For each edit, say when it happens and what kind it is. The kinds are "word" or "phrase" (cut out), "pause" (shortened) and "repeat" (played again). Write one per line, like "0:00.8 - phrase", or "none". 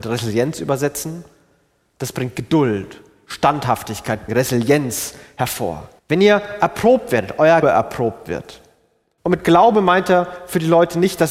0:04.3 - word
0:06.0 - pause
0:07.6 - word

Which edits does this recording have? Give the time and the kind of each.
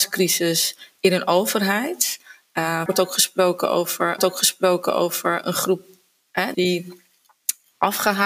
0:02.9 - word
0:04.2 - repeat
0:06.5 - word

